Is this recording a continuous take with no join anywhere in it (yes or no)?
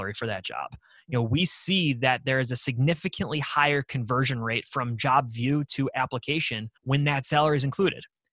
no